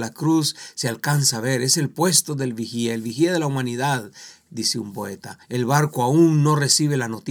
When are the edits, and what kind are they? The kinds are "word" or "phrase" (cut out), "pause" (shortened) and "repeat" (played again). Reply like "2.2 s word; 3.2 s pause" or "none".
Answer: 5.4 s pause